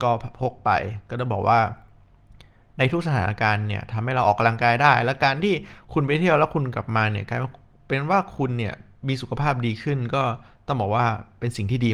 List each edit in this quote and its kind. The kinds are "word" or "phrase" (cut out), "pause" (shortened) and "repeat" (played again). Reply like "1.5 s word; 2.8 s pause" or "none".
none